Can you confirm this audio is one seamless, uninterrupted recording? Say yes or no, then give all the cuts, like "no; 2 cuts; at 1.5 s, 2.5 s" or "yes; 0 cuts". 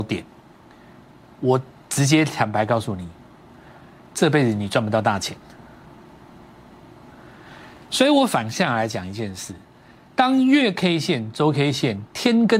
yes; 0 cuts